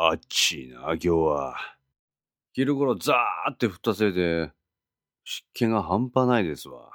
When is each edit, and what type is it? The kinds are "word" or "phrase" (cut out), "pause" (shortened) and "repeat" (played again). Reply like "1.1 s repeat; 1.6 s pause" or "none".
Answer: none